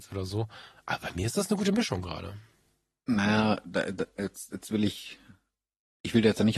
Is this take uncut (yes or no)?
yes